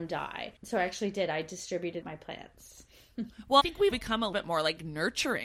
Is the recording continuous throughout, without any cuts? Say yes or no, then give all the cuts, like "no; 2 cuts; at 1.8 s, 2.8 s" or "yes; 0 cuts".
no; 4 cuts; at 2.0 s, 3.6 s, 3.9 s, 4.3 s